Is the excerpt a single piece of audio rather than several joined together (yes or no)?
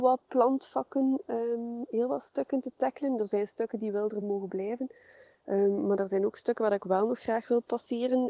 yes